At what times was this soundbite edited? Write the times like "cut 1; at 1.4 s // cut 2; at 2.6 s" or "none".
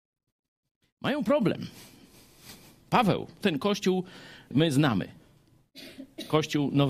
cut 1; at 3.4 s // cut 2; at 4.5 s